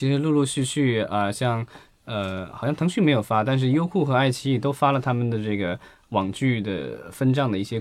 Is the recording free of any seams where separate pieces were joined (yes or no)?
yes